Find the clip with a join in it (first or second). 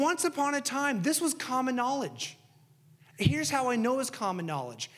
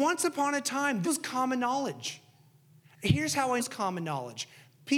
second